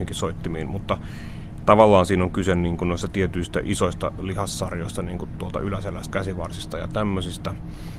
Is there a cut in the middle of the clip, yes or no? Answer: yes